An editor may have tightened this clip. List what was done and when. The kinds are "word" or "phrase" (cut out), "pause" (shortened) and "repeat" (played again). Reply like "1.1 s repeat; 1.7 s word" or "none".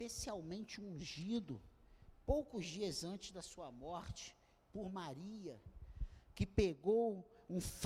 none